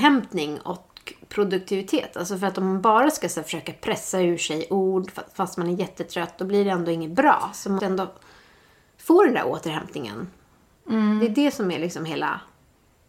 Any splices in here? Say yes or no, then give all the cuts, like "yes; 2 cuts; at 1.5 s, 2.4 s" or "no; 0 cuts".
yes; 1 cut; at 7.8 s